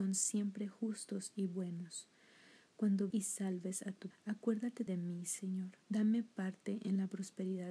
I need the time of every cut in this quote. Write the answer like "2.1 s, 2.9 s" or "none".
3.1 s, 4.1 s, 4.9 s, 5.8 s